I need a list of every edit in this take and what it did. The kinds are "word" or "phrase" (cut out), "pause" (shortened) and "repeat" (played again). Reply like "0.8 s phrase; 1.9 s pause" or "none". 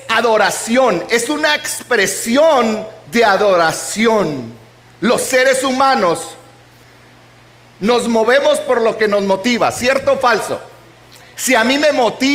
none